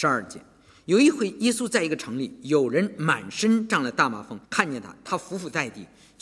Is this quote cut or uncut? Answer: cut